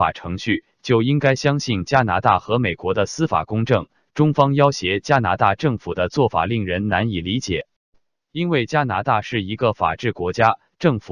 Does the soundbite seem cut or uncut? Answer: uncut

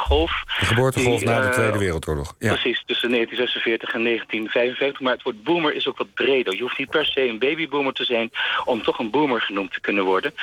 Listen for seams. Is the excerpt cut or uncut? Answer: uncut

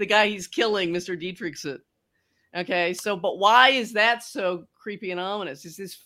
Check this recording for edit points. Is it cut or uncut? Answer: uncut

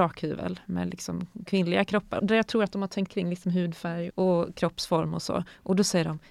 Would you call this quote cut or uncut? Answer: cut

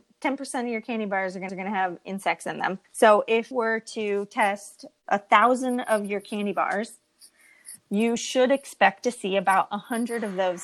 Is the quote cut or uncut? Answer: cut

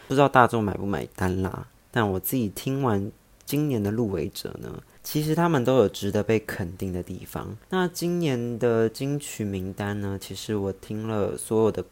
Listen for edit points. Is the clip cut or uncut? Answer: uncut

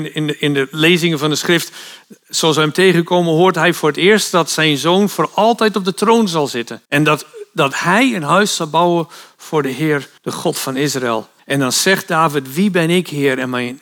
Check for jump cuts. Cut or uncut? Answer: cut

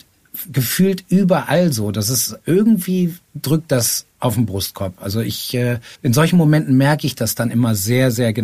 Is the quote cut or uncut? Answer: cut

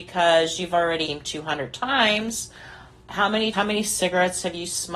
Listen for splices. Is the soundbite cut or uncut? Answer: cut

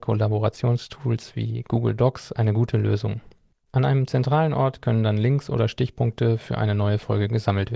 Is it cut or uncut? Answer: uncut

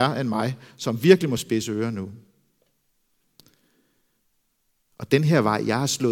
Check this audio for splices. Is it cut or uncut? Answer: uncut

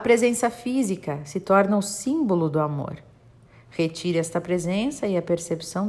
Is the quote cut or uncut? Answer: uncut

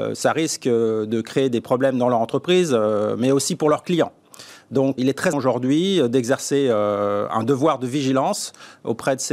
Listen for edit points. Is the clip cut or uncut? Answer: cut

